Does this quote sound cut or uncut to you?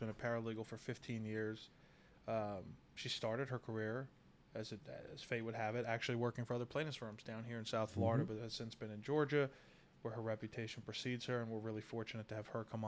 uncut